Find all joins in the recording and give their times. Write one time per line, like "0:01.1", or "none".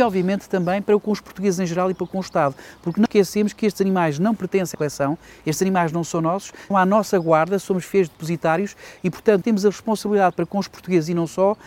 0:03.1
0:04.7
0:06.7
0:09.4